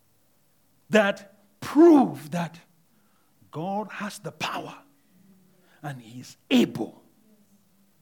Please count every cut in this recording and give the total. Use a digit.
0